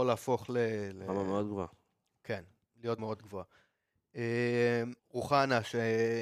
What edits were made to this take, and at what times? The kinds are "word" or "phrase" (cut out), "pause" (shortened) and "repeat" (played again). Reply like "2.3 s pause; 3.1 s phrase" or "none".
3.0 s word; 5.0 s pause